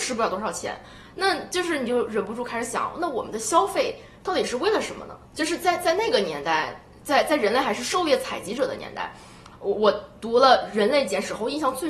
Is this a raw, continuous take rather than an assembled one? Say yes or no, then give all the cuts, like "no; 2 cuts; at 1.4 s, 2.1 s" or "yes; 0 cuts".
no; 1 cut; at 5.3 s